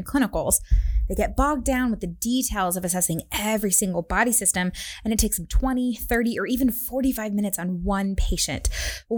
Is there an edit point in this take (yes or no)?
no